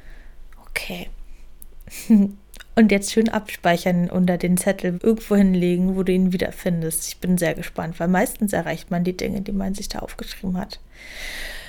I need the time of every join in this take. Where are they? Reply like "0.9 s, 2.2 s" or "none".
4.9 s